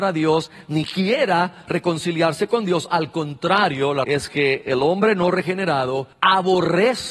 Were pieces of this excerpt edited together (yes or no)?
yes